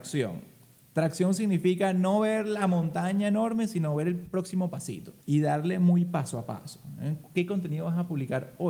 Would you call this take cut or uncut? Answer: cut